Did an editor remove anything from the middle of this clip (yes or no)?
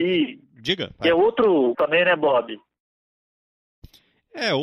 yes